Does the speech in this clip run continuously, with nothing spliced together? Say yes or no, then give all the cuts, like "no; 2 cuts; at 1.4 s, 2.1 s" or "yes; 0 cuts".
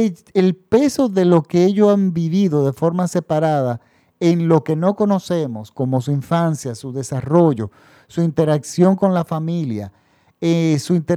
yes; 0 cuts